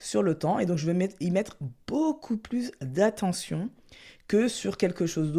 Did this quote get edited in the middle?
no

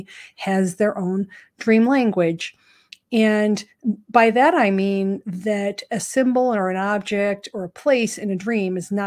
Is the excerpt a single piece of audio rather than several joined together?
yes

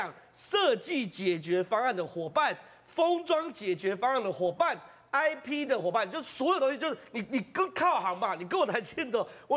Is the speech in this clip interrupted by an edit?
no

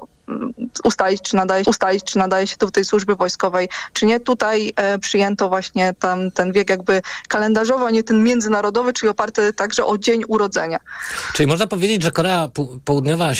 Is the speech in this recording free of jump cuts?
no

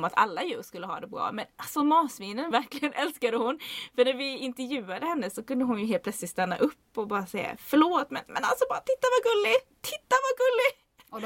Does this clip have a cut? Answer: yes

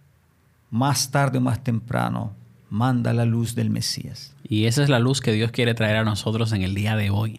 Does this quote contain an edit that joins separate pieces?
no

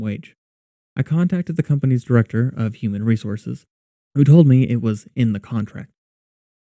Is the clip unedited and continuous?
yes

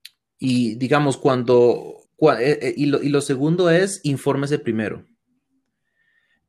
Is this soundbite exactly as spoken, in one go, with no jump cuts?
no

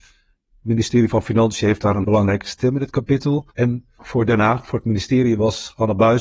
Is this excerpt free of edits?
no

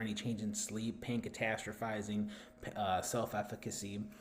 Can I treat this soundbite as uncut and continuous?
yes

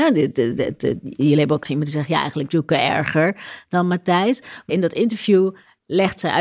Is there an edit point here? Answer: yes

